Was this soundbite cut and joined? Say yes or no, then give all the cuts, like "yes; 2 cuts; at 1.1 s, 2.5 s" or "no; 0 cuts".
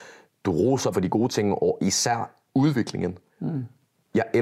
yes; 2 cuts; at 0.9 s, 3.3 s